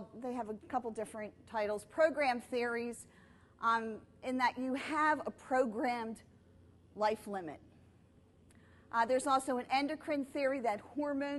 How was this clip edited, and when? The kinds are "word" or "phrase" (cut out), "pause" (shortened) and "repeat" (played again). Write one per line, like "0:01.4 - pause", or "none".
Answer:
none